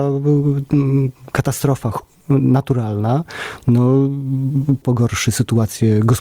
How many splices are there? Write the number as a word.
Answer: one